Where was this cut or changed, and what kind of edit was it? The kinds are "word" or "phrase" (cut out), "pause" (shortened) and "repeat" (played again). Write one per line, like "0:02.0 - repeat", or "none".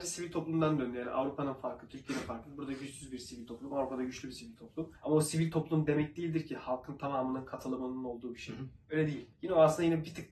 0:05.0 - pause
0:09.3 - pause